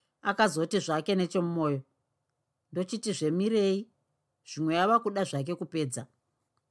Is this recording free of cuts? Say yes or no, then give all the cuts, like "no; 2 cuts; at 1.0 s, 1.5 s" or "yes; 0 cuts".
yes; 0 cuts